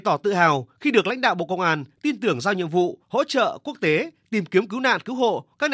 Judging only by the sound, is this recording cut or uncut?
cut